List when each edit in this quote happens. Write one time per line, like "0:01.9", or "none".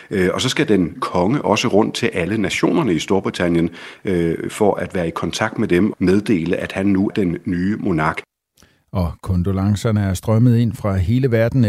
0:01.0
0:05.9
0:07.1